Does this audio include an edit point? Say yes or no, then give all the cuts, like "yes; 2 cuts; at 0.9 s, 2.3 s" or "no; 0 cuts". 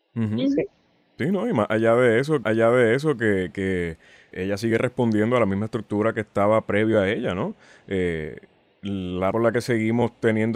yes; 3 cuts; at 2.4 s, 4.3 s, 9.3 s